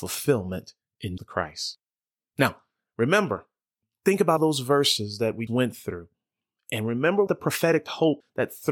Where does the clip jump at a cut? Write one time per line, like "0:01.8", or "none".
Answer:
0:01.2
0:04.4
0:05.5
0:07.3